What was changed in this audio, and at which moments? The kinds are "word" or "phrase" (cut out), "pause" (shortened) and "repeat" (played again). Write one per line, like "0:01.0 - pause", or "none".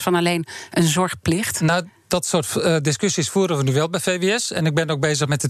none